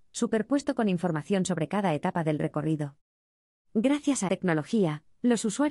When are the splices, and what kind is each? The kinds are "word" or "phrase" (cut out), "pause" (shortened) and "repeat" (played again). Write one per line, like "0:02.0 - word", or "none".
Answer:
0:04.3 - word